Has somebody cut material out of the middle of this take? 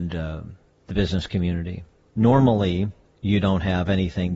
no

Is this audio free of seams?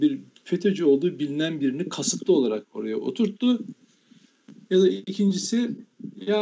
yes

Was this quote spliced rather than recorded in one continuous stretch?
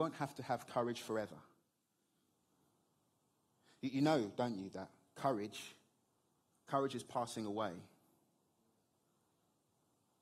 no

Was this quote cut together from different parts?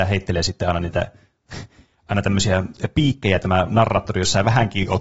no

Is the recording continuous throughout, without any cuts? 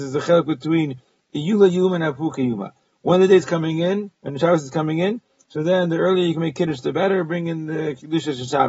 yes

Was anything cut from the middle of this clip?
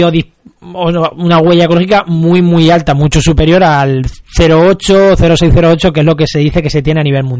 no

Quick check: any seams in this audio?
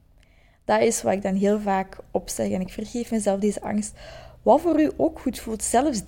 no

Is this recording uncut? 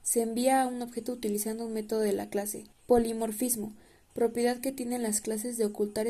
no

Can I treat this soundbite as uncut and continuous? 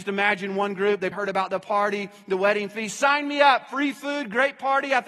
no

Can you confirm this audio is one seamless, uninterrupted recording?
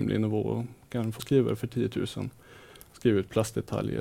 no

